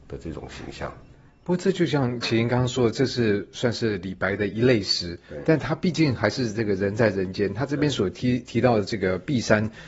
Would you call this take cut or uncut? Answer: uncut